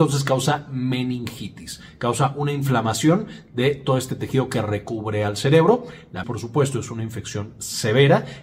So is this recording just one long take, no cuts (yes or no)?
no